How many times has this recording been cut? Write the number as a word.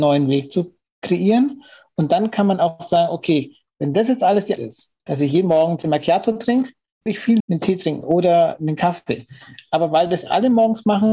six